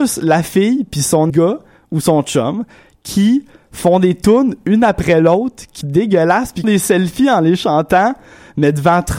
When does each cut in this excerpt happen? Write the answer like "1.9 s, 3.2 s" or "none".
1.3 s, 5.8 s, 6.6 s